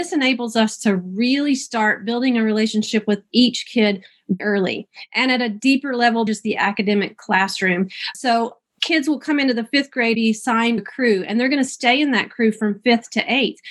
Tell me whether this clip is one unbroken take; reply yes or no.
no